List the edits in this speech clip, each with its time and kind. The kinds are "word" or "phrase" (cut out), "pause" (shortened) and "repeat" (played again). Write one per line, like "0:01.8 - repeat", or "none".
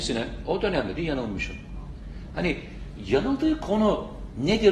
0:01.0 - phrase